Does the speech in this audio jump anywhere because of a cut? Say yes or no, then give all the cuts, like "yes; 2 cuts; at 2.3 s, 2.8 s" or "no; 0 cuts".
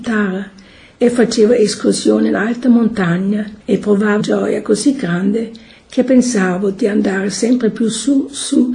yes; 2 cuts; at 3.6 s, 4.2 s